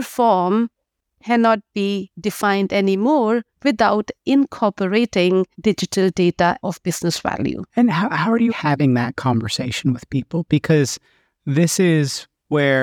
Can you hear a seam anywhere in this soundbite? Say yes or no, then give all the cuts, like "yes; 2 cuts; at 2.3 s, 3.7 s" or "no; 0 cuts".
yes; 5 cuts; at 3.5 s, 5.5 s, 6.6 s, 7.7 s, 8.5 s